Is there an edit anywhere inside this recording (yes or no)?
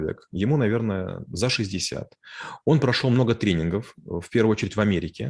no